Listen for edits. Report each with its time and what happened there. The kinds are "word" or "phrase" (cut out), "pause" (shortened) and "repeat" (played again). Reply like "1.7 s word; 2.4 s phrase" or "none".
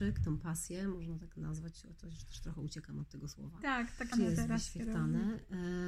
4.1 s word